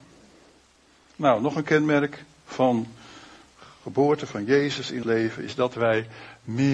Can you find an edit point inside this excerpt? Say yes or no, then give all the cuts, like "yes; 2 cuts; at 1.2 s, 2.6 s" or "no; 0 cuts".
yes; 1 cut; at 5.0 s